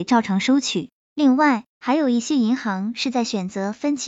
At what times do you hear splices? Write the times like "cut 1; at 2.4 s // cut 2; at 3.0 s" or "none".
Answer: cut 1; at 1.7 s